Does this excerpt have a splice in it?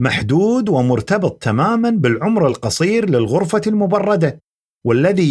no; 0 cuts

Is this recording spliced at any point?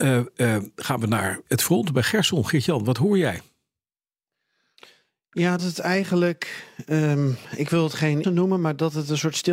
yes; 3 cuts; at 1.5 s, 5.6 s, 8.2 s

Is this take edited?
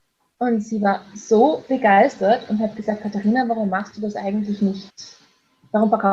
no; 0 cuts

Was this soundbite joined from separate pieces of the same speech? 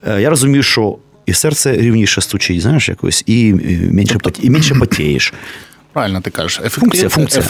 yes; 1 cut; at 1.1 s

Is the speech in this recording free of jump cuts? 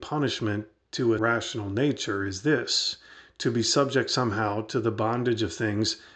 no; 1 cut; at 1.2 s

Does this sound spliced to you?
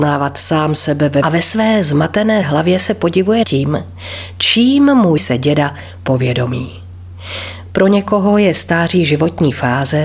yes; 4 cuts; at 1.2 s, 2.4 s, 3.4 s, 5.2 s

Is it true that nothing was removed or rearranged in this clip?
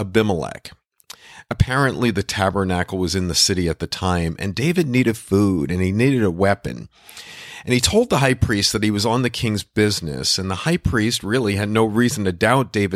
yes; 0 cuts

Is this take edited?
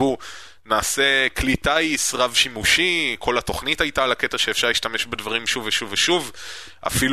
no; 0 cuts

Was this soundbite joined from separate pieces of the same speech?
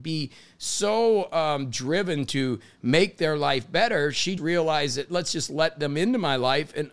yes; 1 cut; at 4.4 s

